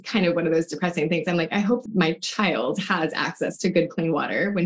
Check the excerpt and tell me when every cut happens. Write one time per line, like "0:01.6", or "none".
0:01.9